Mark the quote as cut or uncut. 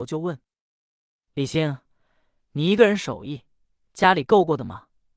uncut